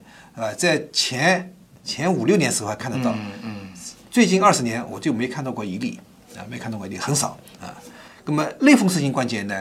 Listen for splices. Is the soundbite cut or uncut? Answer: uncut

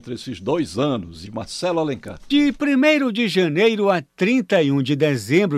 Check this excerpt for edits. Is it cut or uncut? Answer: cut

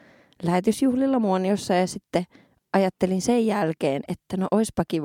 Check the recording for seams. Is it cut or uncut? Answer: uncut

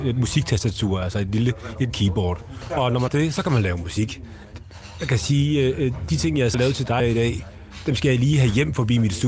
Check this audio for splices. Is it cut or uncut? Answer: cut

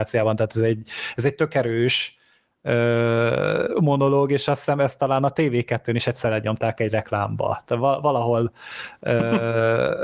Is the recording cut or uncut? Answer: uncut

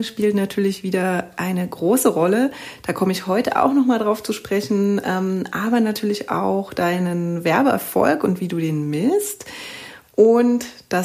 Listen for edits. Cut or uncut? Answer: uncut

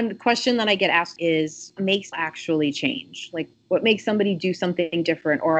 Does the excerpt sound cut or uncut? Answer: cut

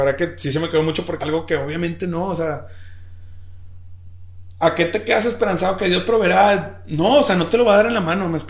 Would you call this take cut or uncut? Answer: cut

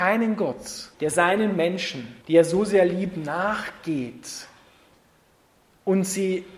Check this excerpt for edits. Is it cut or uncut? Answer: cut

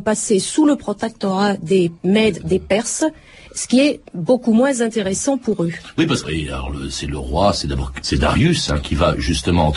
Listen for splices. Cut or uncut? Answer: cut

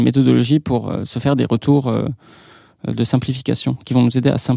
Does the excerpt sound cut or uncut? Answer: uncut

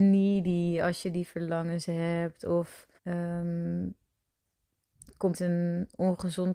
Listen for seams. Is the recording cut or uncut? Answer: cut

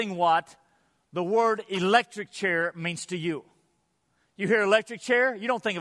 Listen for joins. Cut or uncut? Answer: uncut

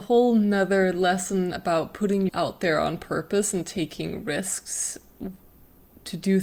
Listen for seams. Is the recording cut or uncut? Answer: cut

